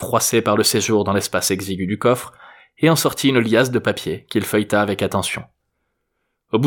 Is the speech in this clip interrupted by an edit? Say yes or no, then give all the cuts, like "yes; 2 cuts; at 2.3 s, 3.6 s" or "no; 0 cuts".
no; 0 cuts